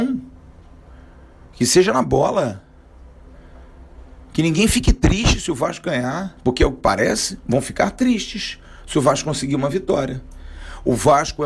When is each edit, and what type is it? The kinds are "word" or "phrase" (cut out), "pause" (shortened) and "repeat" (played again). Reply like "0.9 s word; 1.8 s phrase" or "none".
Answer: none

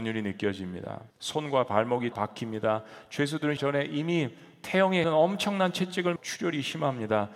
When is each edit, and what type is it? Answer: 1.1 s pause; 2.1 s phrase; 3.6 s word; 5.0 s word; 6.2 s word

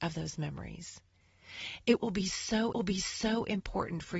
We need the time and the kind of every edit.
2.7 s repeat

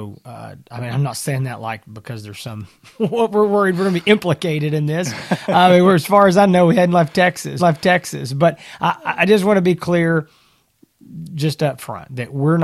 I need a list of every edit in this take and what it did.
2.9 s pause; 7.6 s repeat

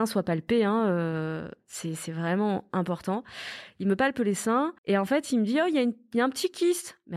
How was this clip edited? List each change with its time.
4.8 s pause

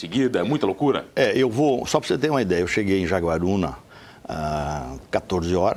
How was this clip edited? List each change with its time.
none

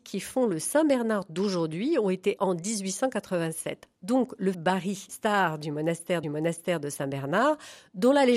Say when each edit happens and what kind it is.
2.4 s word; 4.5 s word; 5.1 s word; 6.2 s repeat

